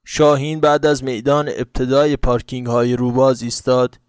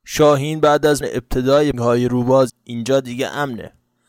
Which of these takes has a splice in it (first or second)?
second